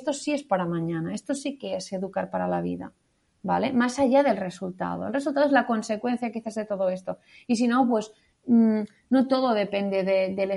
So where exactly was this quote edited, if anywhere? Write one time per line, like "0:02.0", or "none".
none